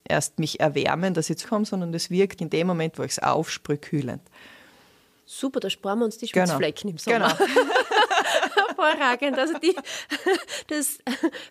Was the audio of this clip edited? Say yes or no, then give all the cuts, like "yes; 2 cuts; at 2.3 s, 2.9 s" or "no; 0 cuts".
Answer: yes; 2 cuts; at 1.4 s, 2.4 s